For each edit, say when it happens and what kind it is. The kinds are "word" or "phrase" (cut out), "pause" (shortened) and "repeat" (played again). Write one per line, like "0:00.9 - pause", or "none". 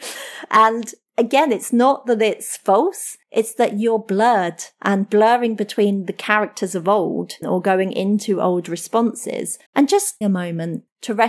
0:01.1 - pause
0:03.2 - pause
0:07.4 - word
0:09.7 - pause
0:10.2 - word